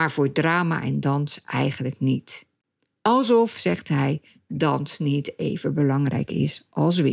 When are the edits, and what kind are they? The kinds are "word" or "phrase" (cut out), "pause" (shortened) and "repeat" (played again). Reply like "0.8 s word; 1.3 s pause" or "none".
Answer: none